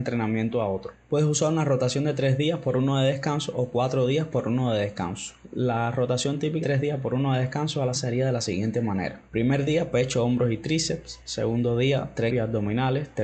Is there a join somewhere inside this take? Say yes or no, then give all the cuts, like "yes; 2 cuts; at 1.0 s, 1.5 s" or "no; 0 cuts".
yes; 3 cuts; at 6.6 s, 7.9 s, 12.3 s